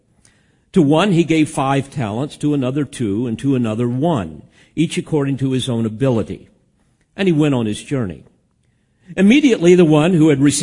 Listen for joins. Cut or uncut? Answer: uncut